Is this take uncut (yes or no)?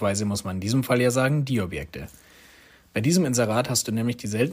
yes